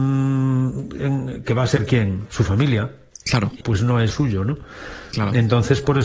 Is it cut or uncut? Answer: cut